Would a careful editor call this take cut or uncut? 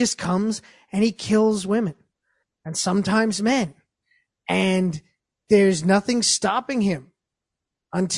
uncut